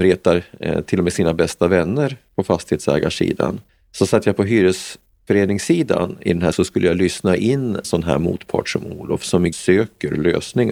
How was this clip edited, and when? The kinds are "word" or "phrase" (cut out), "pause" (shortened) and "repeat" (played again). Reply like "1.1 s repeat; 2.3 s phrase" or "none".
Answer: 3.7 s pause; 6.5 s word; 7.8 s word; 9.5 s word